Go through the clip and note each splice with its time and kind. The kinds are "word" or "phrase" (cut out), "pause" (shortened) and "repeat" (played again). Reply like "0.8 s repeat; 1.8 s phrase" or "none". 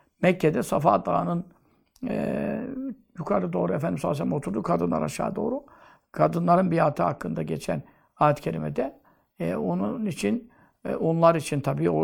none

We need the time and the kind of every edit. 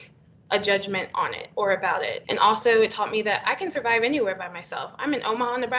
none

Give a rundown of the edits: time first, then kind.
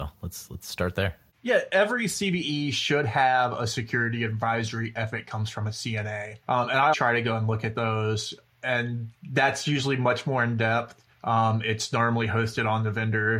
1.7 s word; 6.4 s pause; 6.9 s word; 11.1 s pause

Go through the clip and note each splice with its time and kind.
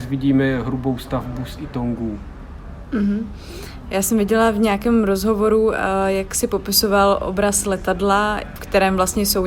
none

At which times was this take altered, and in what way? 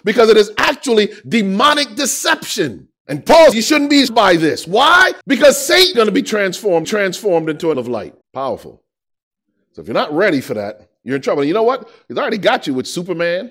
3.0 s pause; 3.5 s word; 4.1 s word; 5.2 s pause; 5.9 s word; 6.8 s repeat; 7.7 s word; 8.2 s pause

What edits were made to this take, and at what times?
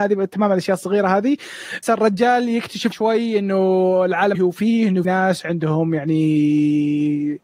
1.8 s word; 2.9 s word; 4.3 s word; 5.0 s word

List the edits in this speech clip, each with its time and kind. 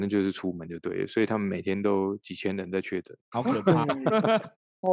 3.2 s pause

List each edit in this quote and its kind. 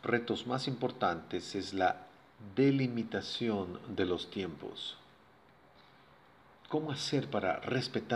none

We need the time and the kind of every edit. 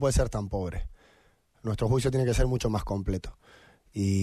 none

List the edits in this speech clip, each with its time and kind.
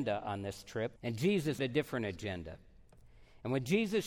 1.0 s pause; 1.6 s word

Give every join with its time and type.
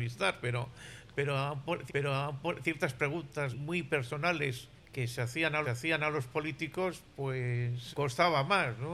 1.9 s repeat; 3.5 s word; 4.7 s pause; 5.6 s repeat; 7.9 s word

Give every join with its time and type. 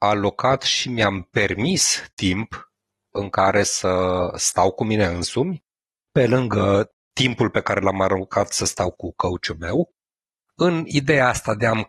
none

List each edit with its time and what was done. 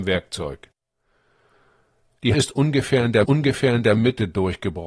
2.3 s word; 3.2 s repeat

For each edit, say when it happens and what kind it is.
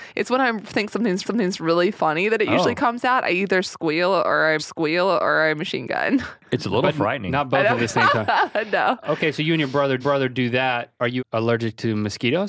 1.2 s repeat; 4.6 s repeat; 6.4 s pause; 10.0 s repeat; 11.2 s word

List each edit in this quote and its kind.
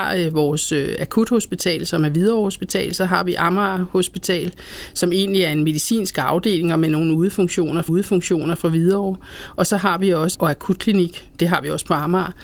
7.9 s repeat; 10.3 s phrase

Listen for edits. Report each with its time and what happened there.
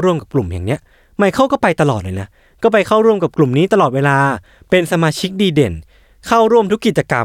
none

